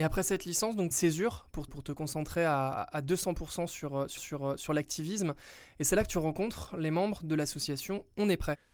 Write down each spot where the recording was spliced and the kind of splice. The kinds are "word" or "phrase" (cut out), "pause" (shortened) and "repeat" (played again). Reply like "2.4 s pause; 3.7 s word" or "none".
0.9 s phrase; 1.7 s word; 4.2 s repeat